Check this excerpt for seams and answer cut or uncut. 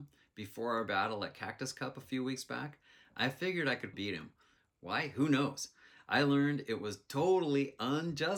cut